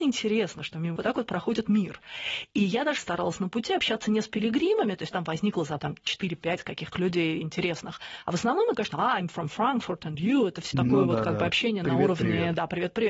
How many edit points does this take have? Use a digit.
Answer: 8